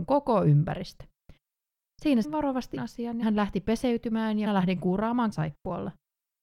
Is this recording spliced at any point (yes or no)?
yes